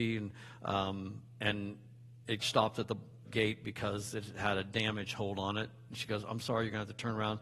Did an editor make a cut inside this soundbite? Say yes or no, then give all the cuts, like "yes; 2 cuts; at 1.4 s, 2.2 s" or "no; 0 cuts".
yes; 2 cuts; at 2.4 s, 3.2 s